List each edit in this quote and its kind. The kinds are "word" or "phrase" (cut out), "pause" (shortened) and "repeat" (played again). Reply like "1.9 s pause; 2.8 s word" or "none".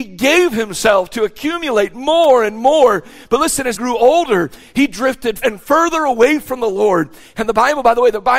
3.7 s word; 5.4 s word